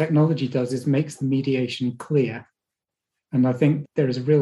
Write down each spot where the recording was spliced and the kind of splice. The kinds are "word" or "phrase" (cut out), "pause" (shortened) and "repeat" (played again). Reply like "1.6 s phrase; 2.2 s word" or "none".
none